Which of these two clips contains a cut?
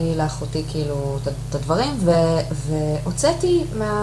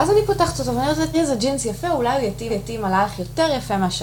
second; 2 cuts; at 1.1 s, 2.5 s

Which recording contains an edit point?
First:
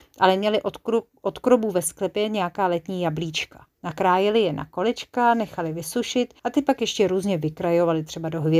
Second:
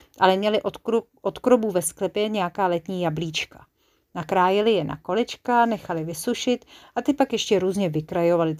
first; 2 cuts; at 3.7 s, 6.4 s

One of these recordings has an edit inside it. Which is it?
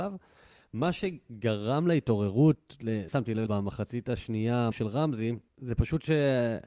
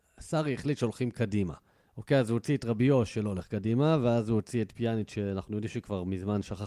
first; 4 cuts; at 3.1 s, 3.5 s, 4.7 s, 5.5 s

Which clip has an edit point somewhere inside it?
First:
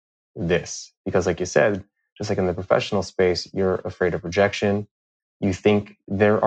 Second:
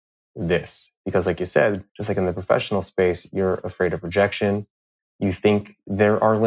second; 1 cut; at 1.9 s

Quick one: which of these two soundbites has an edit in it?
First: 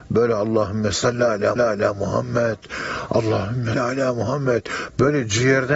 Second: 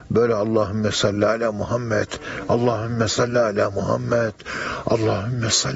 first; 3 cuts; at 0.9 s, 1.6 s, 3.7 s

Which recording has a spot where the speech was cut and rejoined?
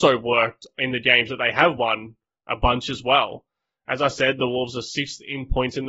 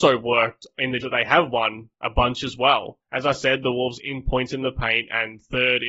second; 4 cuts; at 1.0 s, 1.9 s, 3.0 s, 4.0 s

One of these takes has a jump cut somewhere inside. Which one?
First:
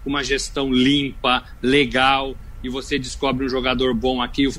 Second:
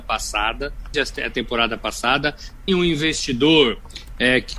second; 2 cuts; at 0.9 s, 2.7 s

